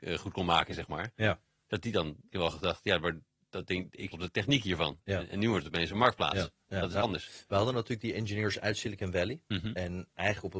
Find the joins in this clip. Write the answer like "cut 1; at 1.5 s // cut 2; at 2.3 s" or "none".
cut 1; at 2.3 s // cut 2; at 4.1 s